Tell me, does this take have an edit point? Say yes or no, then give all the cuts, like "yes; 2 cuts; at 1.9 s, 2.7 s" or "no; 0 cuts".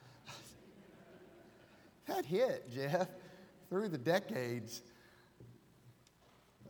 yes; 1 cut; at 2.2 s